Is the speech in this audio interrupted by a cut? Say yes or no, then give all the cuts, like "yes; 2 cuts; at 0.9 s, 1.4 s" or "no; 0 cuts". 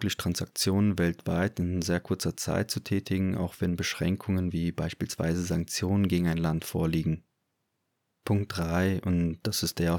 no; 0 cuts